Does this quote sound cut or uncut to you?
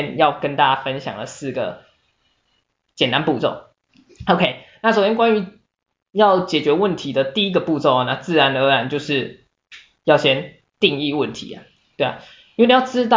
uncut